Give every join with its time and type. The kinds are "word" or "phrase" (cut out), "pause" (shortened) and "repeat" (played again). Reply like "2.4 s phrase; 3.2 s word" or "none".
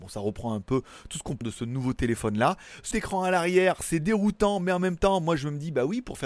1.4 s word; 2.9 s word